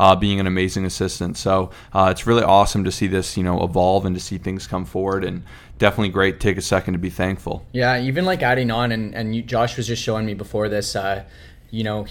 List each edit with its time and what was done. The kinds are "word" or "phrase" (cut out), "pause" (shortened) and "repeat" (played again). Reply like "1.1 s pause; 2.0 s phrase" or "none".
none